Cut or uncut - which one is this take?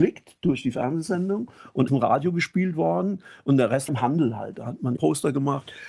cut